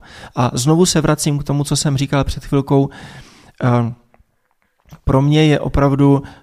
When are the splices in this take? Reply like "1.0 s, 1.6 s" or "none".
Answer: none